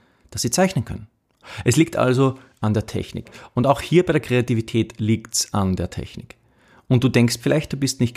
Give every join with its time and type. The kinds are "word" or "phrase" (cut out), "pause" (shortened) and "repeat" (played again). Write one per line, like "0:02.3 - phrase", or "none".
none

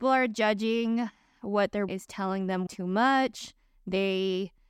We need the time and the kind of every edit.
0:01.9 - word
0:02.7 - word

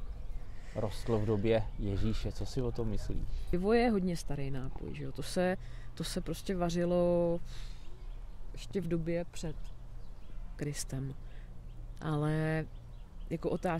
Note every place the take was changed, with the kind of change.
none

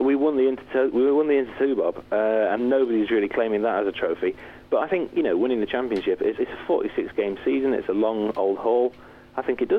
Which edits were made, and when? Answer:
0:02.6 - word
0:06.4 - word

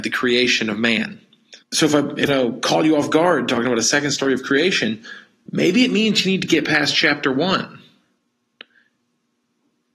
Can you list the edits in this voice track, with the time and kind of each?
0:01.6 - pause
0:02.3 - phrase

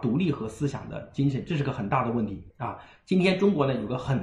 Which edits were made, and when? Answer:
0:02.5 - pause

